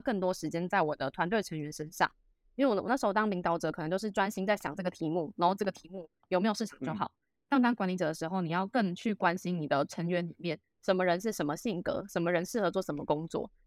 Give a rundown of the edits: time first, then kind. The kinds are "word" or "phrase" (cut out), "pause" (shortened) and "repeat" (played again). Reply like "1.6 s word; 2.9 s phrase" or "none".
none